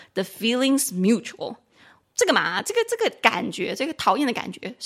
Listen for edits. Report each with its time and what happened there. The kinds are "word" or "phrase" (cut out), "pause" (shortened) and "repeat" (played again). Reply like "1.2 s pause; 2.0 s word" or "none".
none